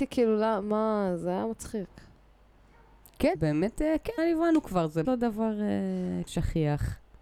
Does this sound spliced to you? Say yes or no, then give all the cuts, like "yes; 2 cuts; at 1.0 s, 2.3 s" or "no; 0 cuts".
yes; 4 cuts; at 3.3 s, 4.2 s, 5.0 s, 6.3 s